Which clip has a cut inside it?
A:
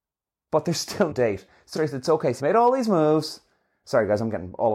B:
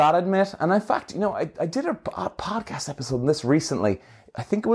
A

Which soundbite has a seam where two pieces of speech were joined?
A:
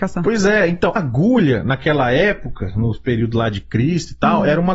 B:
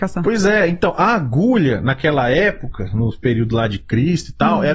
A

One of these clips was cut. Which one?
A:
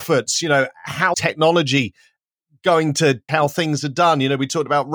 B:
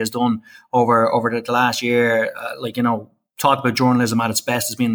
A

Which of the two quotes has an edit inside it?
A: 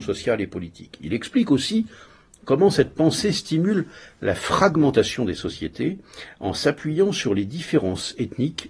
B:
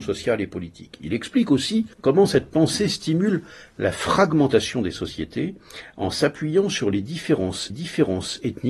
B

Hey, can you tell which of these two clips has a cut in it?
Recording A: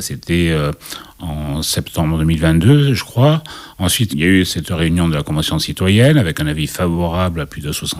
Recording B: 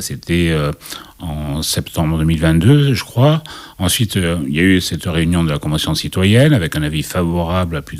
A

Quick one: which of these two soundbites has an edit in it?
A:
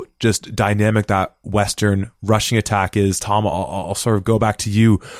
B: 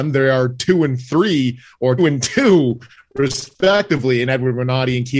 B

